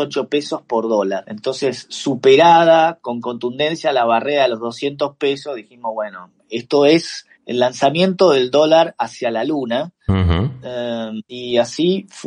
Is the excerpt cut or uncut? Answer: cut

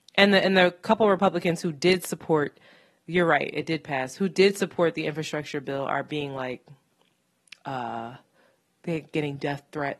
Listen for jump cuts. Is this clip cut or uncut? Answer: uncut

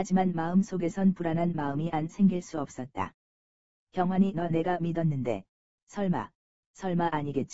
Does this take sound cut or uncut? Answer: uncut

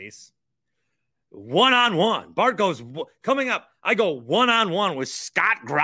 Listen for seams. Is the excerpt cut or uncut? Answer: uncut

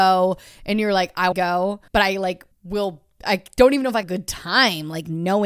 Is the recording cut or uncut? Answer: cut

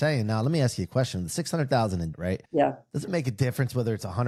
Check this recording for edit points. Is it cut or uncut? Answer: cut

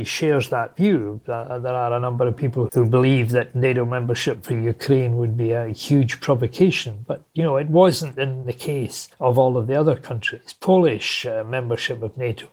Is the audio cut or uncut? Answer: cut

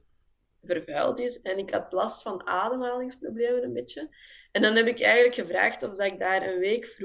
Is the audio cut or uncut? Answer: uncut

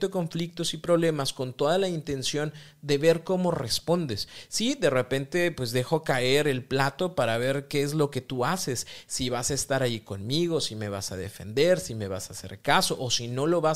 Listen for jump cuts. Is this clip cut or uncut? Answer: uncut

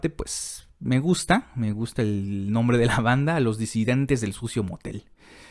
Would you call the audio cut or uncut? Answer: uncut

